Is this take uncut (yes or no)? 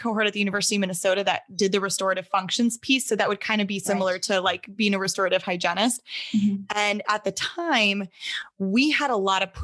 yes